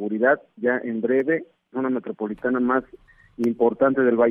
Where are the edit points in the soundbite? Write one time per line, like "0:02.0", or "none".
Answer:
0:01.7